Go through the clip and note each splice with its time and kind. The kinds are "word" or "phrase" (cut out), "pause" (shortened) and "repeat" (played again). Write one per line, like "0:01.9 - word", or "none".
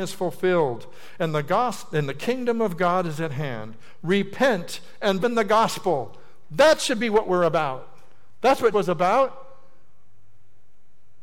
0:05.2 - word
0:08.7 - word